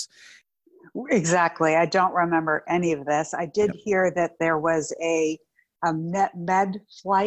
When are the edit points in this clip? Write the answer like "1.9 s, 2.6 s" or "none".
none